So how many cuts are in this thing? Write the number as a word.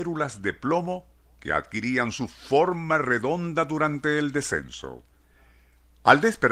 zero